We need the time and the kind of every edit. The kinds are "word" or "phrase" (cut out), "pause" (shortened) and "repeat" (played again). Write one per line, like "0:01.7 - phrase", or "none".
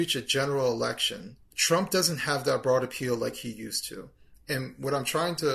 0:01.4 - pause